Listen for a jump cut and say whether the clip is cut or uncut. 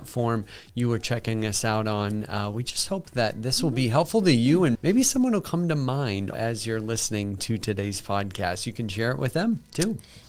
cut